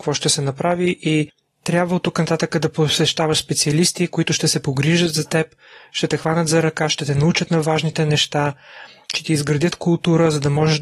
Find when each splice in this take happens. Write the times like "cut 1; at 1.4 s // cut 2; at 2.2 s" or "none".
none